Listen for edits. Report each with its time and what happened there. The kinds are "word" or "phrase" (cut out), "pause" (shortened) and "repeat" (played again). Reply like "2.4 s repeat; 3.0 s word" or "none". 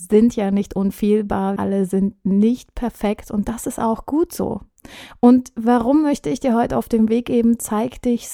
1.6 s word; 6.7 s word